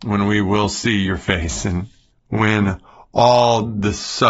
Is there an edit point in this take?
yes; 1 cut; at 2.1 s

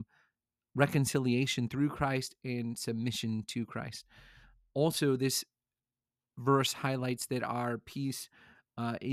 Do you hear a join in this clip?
no; 0 cuts

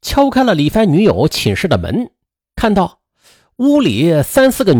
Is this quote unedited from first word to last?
yes; 0 cuts

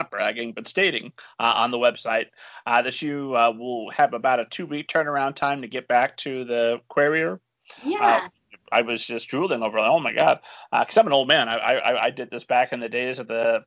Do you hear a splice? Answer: no; 0 cuts

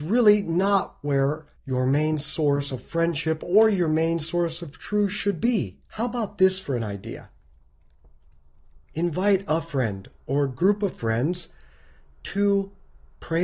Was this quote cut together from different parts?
yes; 3 cuts; at 1.6 s, 5.8 s, 8.8 s

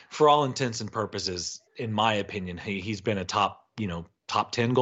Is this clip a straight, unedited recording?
no; 1 cut; at 1.7 s

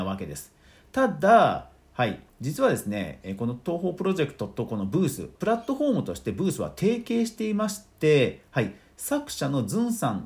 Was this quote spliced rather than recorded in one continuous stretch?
yes; 2 cuts; at 2.3 s, 5.3 s

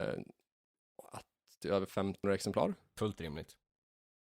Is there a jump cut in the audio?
yes; 2 cuts; at 1.6 s, 2.2 s

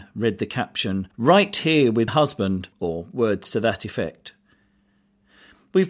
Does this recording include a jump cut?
yes; 3 cuts; at 1.1 s, 2.1 s, 2.7 s

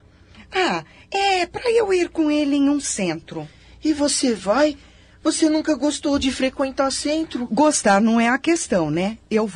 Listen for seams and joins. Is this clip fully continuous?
yes; 0 cuts

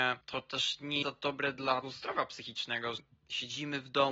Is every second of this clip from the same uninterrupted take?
no; 3 cuts; at 1.0 s, 1.8 s, 3.0 s

